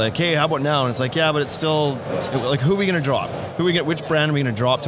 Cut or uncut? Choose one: uncut